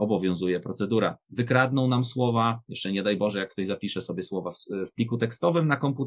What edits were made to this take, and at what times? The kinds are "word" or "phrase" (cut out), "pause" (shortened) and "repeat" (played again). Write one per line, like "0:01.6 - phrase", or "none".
none